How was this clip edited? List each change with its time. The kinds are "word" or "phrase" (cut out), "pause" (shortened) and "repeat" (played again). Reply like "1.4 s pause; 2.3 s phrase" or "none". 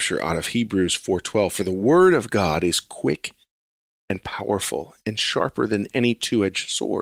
none